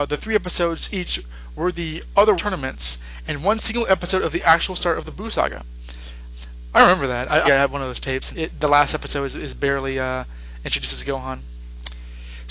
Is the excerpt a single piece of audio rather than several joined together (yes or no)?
no